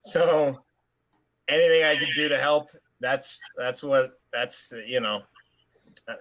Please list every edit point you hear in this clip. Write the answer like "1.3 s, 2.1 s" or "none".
2.9 s, 4.2 s